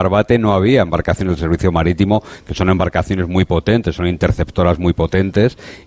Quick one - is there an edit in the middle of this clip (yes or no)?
no